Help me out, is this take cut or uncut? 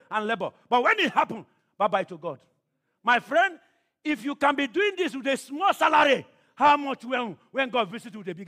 uncut